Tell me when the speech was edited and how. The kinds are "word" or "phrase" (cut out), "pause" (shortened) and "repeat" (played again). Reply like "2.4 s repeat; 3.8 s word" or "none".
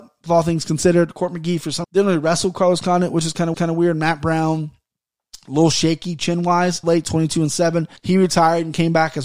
1.8 s word; 3.5 s repeat; 6.8 s phrase; 8.0 s pause